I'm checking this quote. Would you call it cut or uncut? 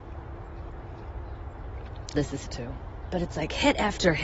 cut